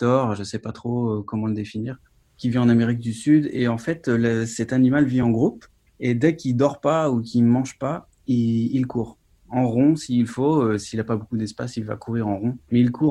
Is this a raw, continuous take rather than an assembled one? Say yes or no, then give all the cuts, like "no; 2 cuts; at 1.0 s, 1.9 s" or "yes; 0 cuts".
yes; 0 cuts